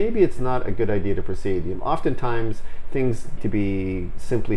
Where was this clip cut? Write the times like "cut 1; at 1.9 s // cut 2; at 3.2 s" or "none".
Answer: cut 1; at 1.8 s // cut 2; at 3.4 s